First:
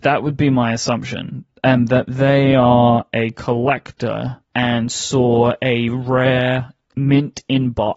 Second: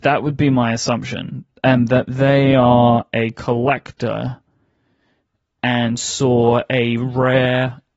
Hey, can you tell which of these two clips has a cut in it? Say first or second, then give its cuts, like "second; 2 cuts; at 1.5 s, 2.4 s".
first; 1 cut; at 4.4 s